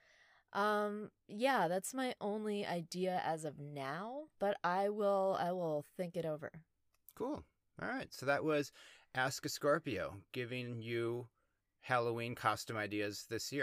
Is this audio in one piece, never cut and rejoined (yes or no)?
yes